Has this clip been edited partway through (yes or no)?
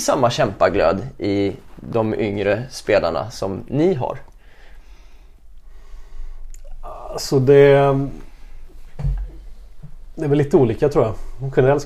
no